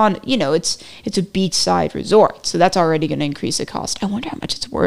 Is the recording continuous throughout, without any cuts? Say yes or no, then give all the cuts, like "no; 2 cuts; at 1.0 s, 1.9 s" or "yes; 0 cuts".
yes; 0 cuts